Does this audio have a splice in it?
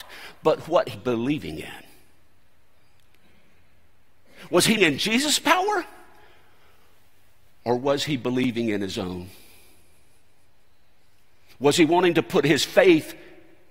yes; 2 cuts; at 0.9 s, 4.8 s

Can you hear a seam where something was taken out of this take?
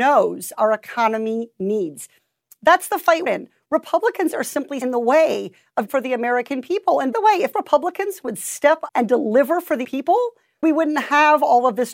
yes; 8 cuts; at 3.3 s, 4.8 s, 5.9 s, 7.1 s, 7.5 s, 8.9 s, 9.8 s, 10.6 s

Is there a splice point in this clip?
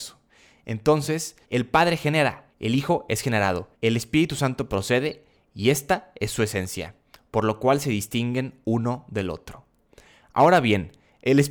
yes; 3 cuts; at 1.4 s, 2.5 s, 3.7 s

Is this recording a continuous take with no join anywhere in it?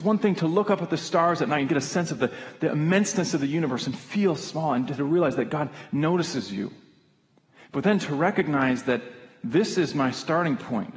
yes; 0 cuts

